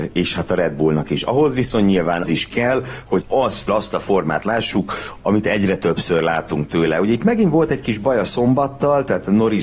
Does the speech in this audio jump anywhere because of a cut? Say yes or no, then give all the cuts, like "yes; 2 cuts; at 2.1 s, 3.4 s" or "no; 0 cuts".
yes; 4 cuts; at 2.2 s, 3.2 s, 3.7 s, 5.2 s